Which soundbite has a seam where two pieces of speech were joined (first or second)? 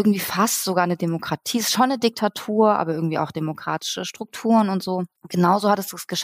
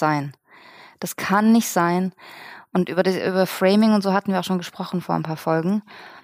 first